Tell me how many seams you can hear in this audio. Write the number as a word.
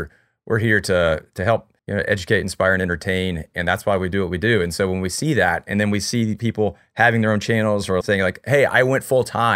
two